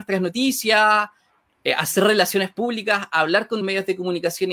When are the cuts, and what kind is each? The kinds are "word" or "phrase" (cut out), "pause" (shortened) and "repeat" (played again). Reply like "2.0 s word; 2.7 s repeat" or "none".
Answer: 3.6 s word